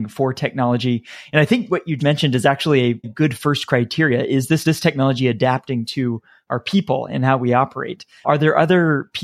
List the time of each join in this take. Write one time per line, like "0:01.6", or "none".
0:02.0
0:03.0
0:04.6